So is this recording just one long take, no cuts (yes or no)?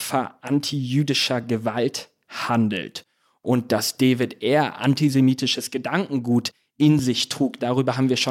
yes